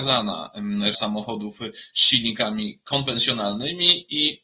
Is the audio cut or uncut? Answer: cut